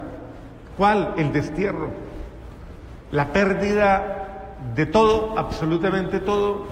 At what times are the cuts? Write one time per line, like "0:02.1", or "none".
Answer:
none